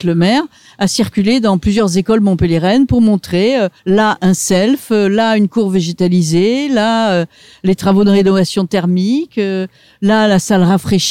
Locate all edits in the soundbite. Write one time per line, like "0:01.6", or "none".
none